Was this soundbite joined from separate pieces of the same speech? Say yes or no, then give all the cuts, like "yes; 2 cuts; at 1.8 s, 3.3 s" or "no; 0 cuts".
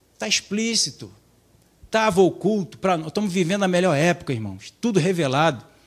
no; 0 cuts